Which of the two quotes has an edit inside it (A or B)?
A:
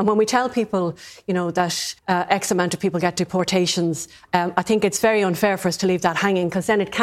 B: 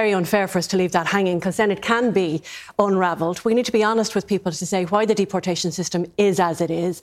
A